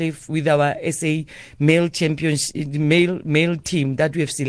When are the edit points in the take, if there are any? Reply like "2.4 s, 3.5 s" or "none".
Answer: none